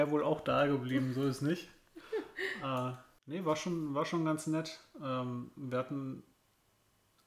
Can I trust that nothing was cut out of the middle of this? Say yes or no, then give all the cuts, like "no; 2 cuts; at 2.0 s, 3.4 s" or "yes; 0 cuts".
yes; 0 cuts